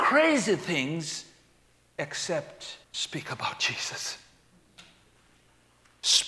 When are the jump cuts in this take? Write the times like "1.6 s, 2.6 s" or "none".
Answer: 2.8 s